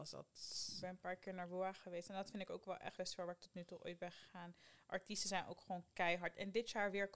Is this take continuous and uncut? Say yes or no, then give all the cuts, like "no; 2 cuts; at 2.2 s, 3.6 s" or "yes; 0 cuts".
no; 1 cut; at 3.0 s